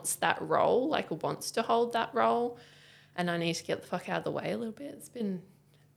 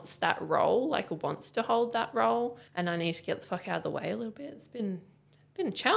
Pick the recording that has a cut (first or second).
second